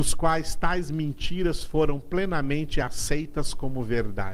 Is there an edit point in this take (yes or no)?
no